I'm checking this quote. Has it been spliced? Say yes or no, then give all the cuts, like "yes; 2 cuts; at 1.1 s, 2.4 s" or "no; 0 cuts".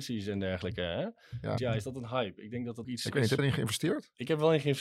yes; 3 cuts; at 1.6 s, 2.8 s, 3.4 s